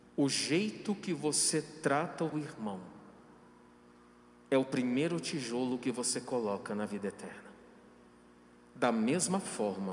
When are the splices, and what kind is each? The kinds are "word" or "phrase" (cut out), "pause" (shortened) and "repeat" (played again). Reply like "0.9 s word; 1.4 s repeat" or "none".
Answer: 2.3 s word

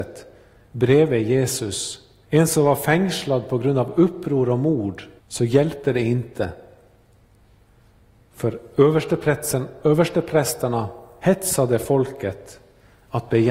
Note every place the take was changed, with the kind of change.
2.2 s pause; 5.2 s pause

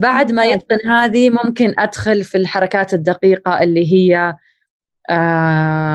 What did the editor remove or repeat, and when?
none

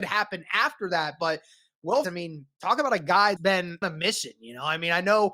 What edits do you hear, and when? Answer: 2.0 s word; 3.4 s word; 3.8 s word

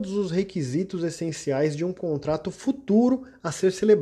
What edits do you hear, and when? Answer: none

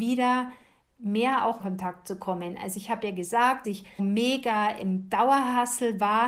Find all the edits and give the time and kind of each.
1.6 s phrase; 3.6 s word; 4.0 s word

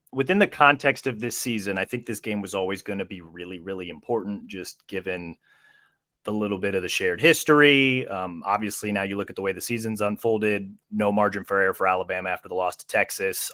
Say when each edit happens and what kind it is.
none

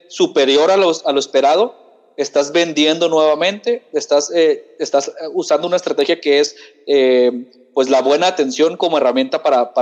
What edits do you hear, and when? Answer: none

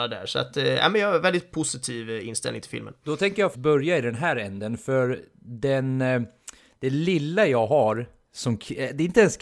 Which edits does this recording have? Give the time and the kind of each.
1.5 s word; 3.5 s word

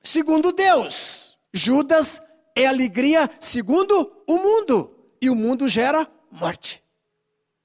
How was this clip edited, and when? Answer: 1.4 s pause; 4.2 s pause

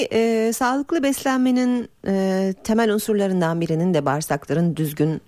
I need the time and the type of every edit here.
none

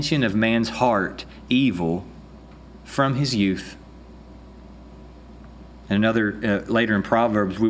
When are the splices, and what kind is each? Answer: 1.5 s word

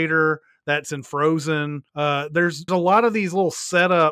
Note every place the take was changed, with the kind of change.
1.9 s pause; 2.7 s word

